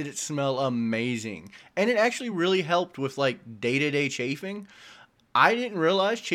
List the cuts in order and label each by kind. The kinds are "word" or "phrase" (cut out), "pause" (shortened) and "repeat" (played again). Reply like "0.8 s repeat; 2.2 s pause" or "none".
none

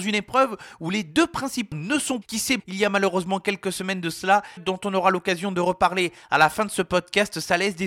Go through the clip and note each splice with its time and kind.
1.7 s word; 2.2 s phrase; 2.6 s word; 4.6 s phrase

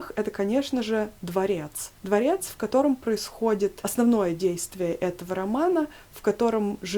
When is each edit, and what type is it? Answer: 2.0 s pause

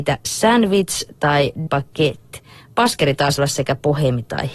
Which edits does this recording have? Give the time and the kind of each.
1.7 s word; 3.4 s word

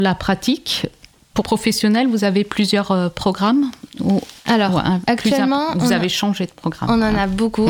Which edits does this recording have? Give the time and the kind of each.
1.4 s word

